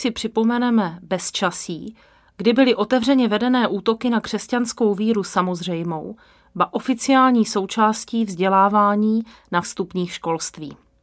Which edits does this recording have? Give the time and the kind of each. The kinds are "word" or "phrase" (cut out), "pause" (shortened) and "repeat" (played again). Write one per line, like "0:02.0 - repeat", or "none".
0:09.6 - word